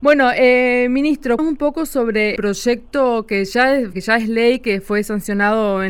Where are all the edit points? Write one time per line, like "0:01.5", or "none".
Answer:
0:01.4
0:02.4
0:03.9